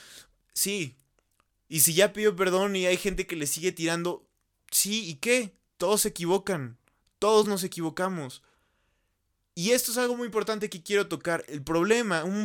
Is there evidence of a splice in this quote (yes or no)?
no